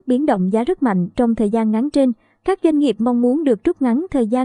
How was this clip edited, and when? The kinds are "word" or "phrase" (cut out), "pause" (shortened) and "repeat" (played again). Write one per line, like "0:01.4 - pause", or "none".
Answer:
none